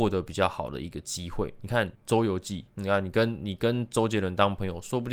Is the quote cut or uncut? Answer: cut